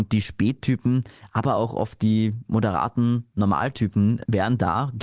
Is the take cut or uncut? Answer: uncut